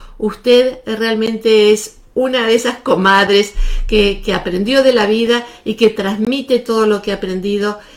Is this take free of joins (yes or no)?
yes